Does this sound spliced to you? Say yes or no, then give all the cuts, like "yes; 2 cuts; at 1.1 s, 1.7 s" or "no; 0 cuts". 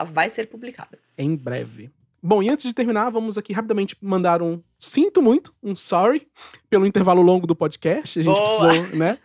no; 0 cuts